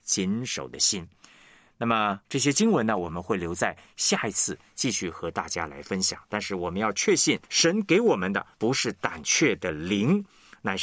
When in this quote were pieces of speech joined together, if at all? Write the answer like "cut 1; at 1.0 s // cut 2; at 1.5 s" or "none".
cut 1; at 2.2 s // cut 2; at 7.5 s // cut 3; at 8.5 s